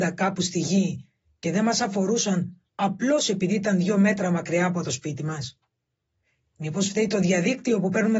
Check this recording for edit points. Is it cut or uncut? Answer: uncut